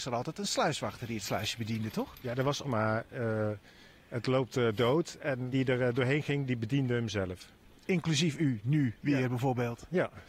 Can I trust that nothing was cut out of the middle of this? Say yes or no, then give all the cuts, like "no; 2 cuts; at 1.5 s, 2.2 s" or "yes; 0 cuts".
no; 2 cuts; at 2.6 s, 5.5 s